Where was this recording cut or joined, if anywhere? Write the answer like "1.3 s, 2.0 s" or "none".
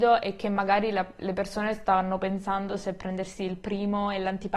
none